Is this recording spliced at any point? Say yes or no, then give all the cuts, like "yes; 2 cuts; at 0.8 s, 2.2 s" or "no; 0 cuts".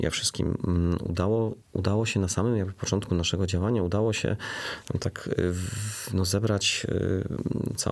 yes; 1 cut; at 1.6 s